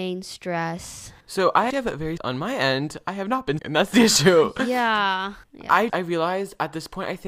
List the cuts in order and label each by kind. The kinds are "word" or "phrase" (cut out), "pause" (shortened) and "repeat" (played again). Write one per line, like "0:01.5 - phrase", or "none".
0:01.2 - pause
0:01.7 - word
0:02.2 - phrase
0:03.6 - word
0:05.4 - pause
0:05.9 - word